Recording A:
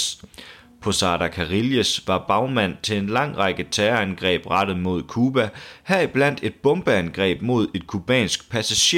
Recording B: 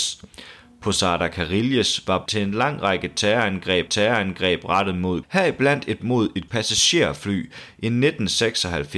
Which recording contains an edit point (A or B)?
B